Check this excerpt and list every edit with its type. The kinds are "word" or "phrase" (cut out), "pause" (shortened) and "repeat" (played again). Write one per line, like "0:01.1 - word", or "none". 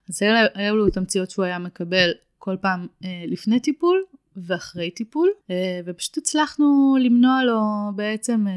0:05.4 - pause